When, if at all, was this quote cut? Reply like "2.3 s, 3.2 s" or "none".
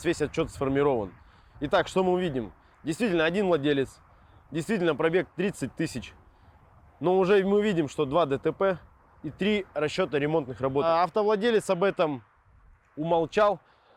none